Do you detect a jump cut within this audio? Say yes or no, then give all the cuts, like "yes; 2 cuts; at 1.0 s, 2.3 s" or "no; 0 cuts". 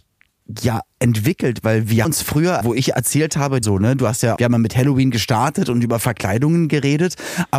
yes; 4 cuts; at 2.0 s, 2.6 s, 3.6 s, 4.4 s